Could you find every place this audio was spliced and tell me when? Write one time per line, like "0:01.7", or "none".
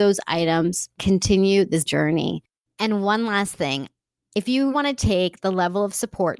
0:01.0
0:01.9
0:04.7